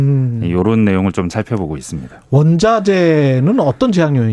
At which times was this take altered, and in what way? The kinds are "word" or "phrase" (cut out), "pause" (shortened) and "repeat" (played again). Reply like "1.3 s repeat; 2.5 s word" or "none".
1.3 s word